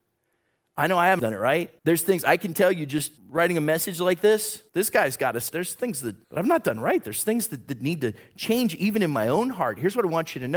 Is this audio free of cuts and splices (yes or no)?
no